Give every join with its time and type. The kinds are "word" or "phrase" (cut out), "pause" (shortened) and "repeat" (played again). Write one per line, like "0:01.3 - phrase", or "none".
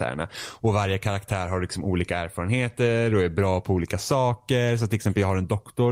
none